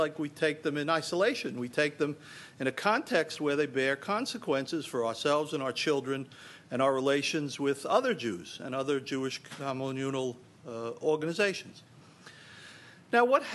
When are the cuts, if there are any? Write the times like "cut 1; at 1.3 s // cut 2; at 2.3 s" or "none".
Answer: none